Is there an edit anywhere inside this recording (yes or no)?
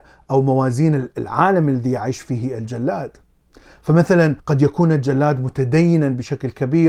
yes